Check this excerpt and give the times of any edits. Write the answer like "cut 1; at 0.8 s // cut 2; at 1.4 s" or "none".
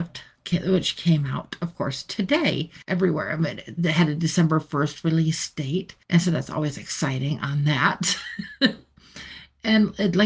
cut 1; at 2.8 s // cut 2; at 6.0 s